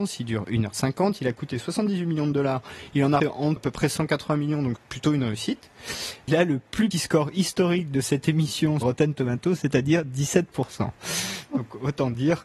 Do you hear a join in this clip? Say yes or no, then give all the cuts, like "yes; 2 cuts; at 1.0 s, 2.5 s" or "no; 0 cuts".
yes; 6 cuts; at 3.2 s, 3.6 s, 4.8 s, 6.3 s, 6.9 s, 8.8 s